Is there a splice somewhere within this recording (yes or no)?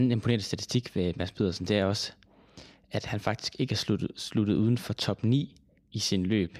no